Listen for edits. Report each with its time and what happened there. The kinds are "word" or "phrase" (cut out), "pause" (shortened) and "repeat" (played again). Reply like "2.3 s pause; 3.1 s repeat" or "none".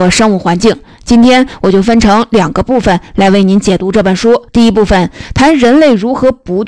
4.5 s pause